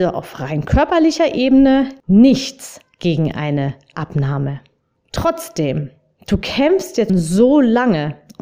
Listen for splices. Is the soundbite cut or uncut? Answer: cut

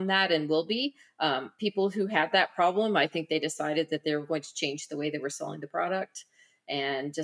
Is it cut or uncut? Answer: uncut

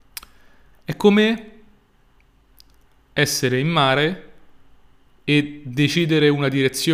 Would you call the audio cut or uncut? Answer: uncut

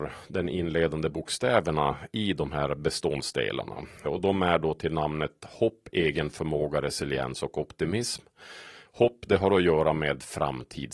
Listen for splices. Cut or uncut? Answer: cut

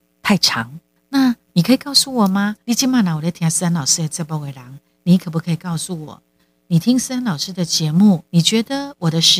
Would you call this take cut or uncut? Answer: cut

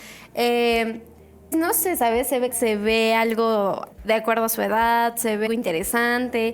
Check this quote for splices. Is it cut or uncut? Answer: cut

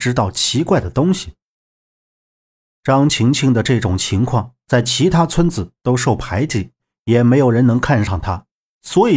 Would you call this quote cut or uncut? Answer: uncut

